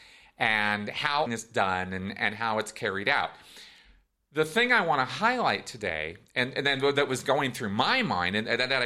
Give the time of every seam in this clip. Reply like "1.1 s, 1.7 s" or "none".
1.3 s